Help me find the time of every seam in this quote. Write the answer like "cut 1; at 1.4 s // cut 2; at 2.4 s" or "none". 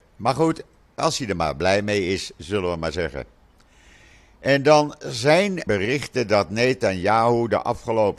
cut 1; at 5.7 s